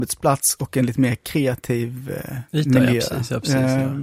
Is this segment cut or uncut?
uncut